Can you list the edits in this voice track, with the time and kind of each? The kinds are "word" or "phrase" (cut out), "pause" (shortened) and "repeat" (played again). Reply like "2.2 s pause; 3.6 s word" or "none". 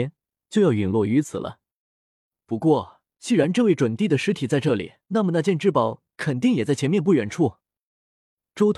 3.1 s pause; 5.0 s pause